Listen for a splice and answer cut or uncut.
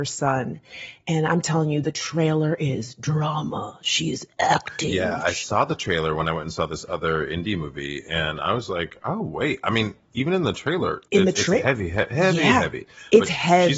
uncut